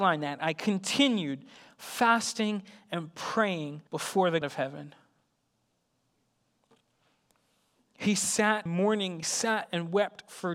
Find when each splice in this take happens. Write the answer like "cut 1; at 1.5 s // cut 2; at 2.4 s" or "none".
cut 1; at 3.9 s // cut 2; at 4.4 s // cut 3; at 8.7 s // cut 4; at 9.2 s